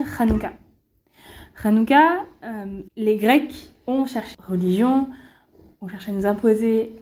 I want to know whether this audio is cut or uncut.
cut